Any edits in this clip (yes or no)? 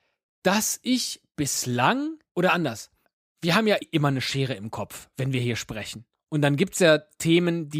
yes